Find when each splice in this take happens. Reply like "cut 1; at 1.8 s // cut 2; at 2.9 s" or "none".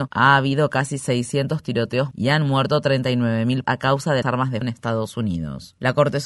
cut 1; at 2.1 s // cut 2; at 3.6 s // cut 3; at 4.2 s // cut 4; at 4.6 s